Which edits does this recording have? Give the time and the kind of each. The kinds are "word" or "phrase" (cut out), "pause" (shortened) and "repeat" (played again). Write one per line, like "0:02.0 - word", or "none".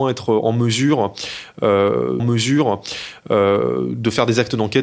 0:02.2 - repeat

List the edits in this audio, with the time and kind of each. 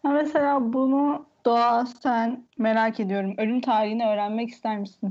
0:01.4 - pause
0:02.5 - pause

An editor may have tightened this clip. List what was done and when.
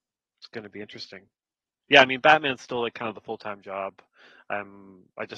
none

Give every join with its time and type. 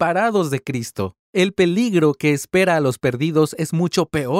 0:01.2 - pause

